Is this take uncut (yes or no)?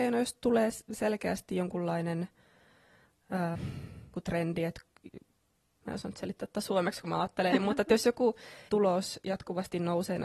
no